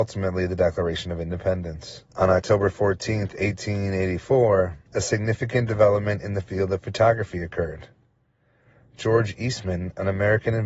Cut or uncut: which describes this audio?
cut